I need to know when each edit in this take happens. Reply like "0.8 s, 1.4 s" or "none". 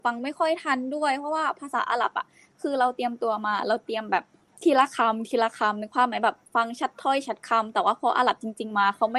none